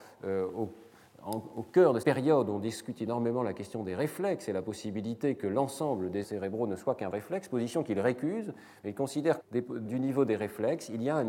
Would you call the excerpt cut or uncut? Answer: cut